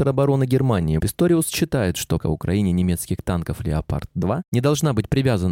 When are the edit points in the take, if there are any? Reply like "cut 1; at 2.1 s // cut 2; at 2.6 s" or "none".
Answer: cut 1; at 1.0 s // cut 2; at 2.2 s